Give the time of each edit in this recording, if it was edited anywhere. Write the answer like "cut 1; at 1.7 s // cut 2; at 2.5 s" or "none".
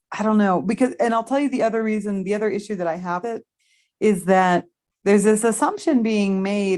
cut 1; at 3.2 s

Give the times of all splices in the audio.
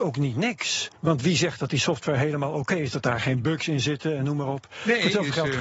cut 1; at 1.0 s

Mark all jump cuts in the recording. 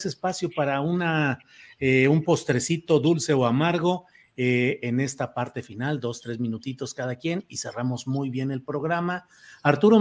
none

